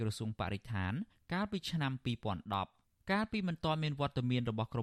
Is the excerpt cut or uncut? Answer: uncut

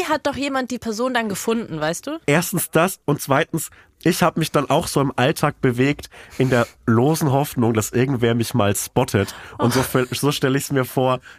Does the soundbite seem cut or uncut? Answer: uncut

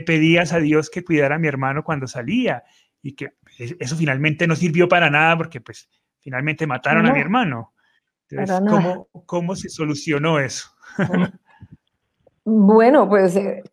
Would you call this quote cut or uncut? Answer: uncut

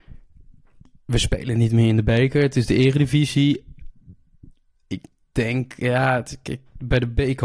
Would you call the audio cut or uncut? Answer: uncut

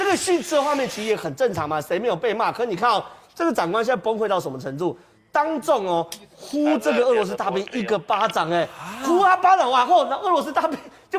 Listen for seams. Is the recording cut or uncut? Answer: uncut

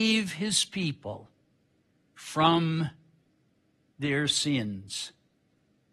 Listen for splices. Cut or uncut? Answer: uncut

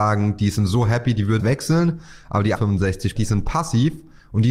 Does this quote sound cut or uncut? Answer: cut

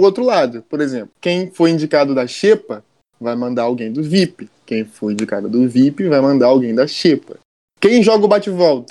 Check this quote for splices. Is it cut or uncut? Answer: uncut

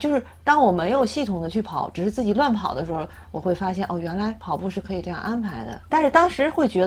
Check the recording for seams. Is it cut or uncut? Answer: cut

